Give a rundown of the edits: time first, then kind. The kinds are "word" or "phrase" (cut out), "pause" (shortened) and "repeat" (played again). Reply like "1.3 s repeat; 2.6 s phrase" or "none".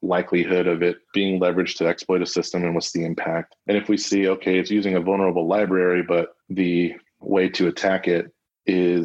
1.0 s pause; 3.6 s pause; 6.4 s pause